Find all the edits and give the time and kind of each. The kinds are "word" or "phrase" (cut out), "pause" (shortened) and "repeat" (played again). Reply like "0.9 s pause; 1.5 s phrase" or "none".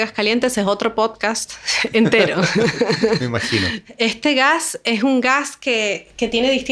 none

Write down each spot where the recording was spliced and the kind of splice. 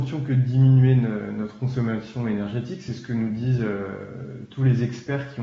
none

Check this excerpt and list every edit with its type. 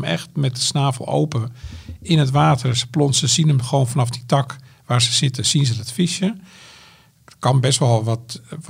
none

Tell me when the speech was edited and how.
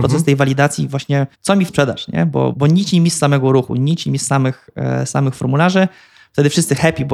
1.3 s pause; 1.7 s phrase; 2.5 s word

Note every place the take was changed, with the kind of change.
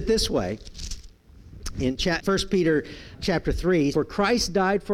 2.2 s word; 3.1 s word; 3.9 s word

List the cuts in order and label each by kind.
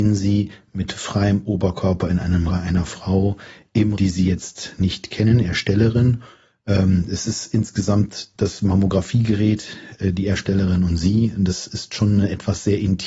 2.5 s word; 4.0 s word

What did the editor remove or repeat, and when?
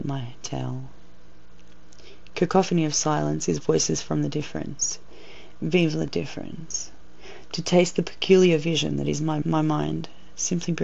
9.4 s word

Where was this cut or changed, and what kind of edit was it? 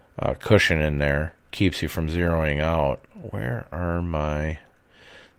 1.4 s pause

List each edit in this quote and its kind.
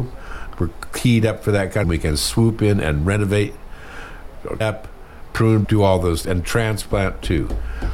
1.8 s phrase; 4.6 s word; 5.6 s word; 6.2 s word

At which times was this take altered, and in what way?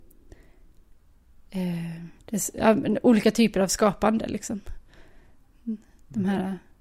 2.2 s pause

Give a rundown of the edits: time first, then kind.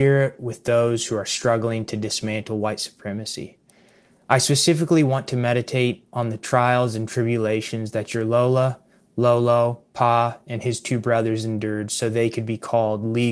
none

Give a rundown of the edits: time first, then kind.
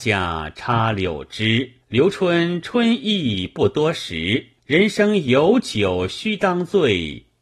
1.8 s pause; 4.6 s pause

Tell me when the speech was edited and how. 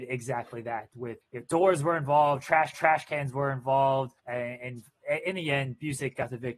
1.2 s word; 2.7 s repeat; 4.2 s pause

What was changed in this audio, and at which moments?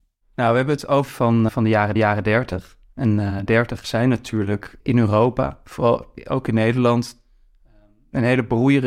1.1 s phrase; 1.5 s word; 2.0 s repeat; 3.5 s phrase; 4.8 s word

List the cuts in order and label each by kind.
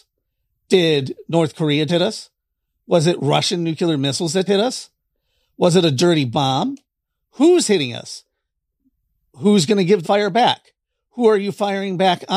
1.9 s word; 4.5 s word; 10.0 s phrase

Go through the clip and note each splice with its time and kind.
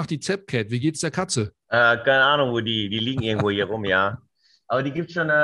1.6 s pause

